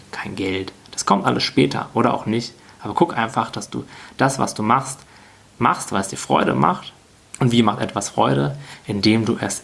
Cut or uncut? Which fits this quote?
uncut